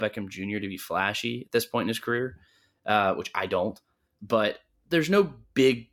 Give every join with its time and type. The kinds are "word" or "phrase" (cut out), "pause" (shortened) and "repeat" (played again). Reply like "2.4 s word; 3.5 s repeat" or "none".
none